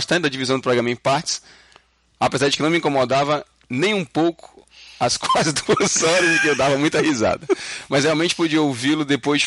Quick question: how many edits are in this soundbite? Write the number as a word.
zero